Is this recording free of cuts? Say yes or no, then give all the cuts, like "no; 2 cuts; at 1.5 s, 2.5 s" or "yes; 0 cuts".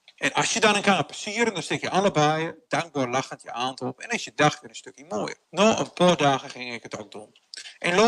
no; 1 cut; at 5.4 s